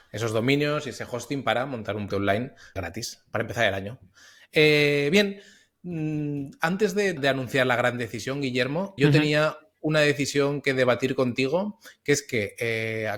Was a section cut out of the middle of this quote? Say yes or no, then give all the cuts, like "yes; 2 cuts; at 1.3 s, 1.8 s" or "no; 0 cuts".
yes; 4 cuts; at 2.1 s, 2.8 s, 7.2 s, 9.0 s